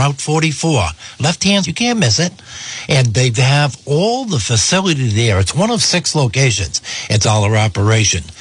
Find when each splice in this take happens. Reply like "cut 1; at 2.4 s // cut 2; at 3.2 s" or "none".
cut 1; at 1.6 s // cut 2; at 7.2 s